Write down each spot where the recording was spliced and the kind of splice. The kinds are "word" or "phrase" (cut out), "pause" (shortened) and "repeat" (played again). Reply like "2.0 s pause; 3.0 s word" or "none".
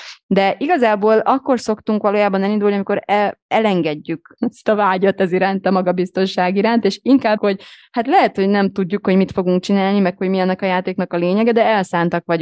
4.4 s word; 7.4 s word